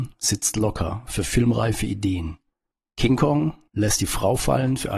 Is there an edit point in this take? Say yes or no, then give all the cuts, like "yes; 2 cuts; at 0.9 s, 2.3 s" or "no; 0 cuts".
no; 0 cuts